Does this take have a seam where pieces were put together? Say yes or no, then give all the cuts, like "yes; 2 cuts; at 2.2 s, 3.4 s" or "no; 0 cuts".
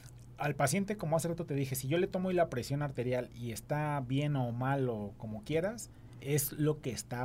no; 0 cuts